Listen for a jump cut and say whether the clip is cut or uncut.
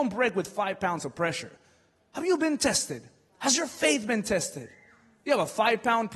uncut